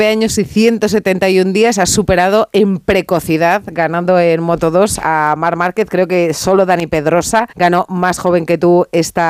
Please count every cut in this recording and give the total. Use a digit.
1